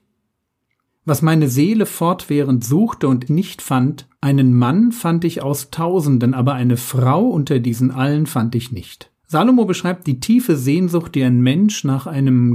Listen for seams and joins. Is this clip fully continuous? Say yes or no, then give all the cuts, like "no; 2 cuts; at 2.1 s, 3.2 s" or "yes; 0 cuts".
no; 3 cuts; at 3.3 s, 4.2 s, 9.2 s